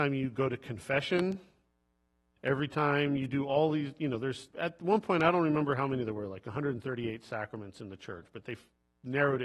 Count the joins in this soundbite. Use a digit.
1